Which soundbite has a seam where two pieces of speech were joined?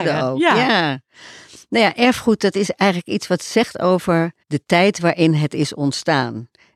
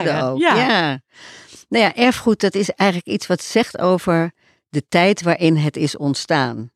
first; 1 cut; at 4.4 s

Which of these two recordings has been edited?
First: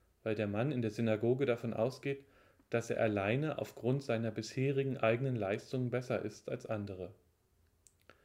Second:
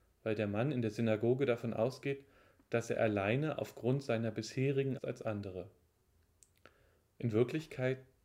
second; 1 cut; at 5.0 s

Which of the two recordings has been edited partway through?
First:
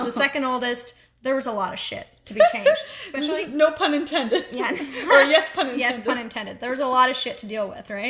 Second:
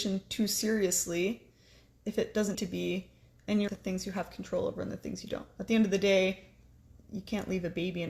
second; 2 cuts; at 2.5 s, 3.7 s

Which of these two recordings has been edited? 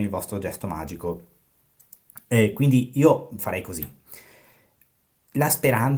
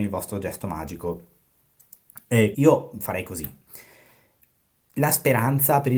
second; 1 cut; at 2.5 s

